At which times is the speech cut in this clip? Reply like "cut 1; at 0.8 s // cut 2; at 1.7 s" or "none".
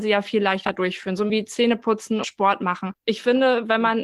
cut 1; at 1.3 s // cut 2; at 2.2 s